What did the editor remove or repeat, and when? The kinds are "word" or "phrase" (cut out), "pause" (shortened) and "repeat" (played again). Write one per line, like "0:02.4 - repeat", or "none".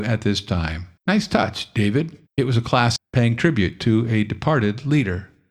0:01.0 - pause
0:02.3 - pause
0:03.0 - word